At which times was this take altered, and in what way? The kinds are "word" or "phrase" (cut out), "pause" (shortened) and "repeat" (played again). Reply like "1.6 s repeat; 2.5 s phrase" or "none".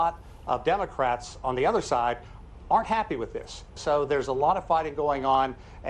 none